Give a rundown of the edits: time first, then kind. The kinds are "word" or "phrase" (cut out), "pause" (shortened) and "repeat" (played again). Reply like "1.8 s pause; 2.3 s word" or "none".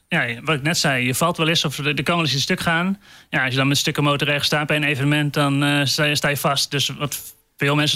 none